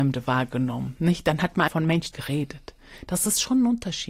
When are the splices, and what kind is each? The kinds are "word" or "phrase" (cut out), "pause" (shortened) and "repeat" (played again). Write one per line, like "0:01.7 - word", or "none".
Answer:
0:01.7 - word
0:02.1 - phrase